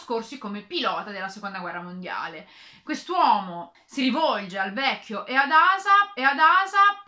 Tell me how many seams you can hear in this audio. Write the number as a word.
one